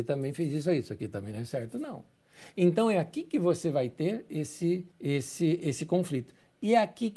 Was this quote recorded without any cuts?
no; 1 cut; at 4.9 s

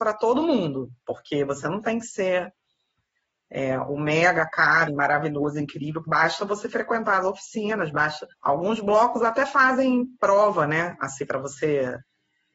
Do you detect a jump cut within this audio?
yes; 3 cuts; at 4.9 s, 6.0 s, 8.3 s

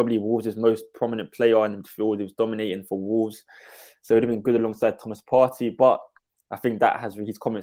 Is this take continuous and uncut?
yes; 0 cuts

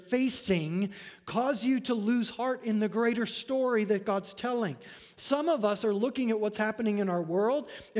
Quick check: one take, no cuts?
yes; 0 cuts

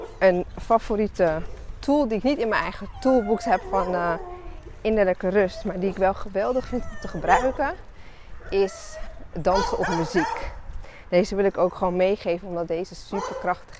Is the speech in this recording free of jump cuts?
yes; 0 cuts

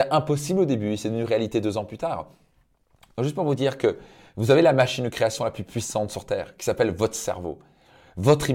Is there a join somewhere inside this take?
no; 0 cuts

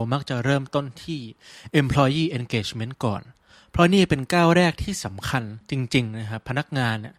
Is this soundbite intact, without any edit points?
yes; 0 cuts

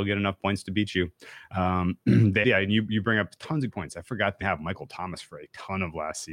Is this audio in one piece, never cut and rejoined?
no; 3 cuts; at 2.4 s, 3.7 s, 4.4 s

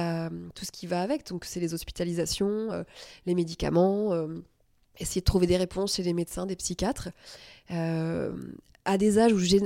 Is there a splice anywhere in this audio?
no; 0 cuts

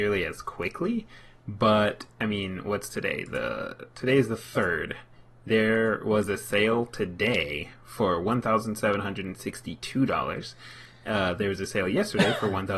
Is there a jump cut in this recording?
no; 0 cuts

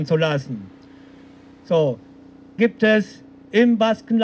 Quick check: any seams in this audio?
yes; 1 cut; at 2.6 s

